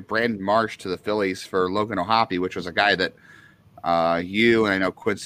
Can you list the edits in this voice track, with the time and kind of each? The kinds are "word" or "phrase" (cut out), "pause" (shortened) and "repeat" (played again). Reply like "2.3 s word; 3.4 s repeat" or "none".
none